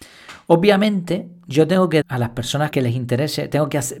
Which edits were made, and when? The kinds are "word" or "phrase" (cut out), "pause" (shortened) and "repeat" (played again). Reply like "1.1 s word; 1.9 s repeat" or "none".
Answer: 2.0 s word; 2.7 s word